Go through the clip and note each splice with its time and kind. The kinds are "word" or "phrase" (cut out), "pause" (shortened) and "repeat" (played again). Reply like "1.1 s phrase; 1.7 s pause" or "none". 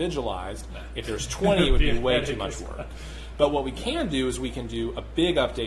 none